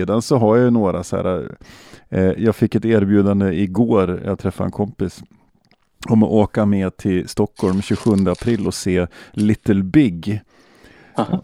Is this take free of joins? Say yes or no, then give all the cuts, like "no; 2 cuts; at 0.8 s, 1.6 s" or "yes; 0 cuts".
yes; 0 cuts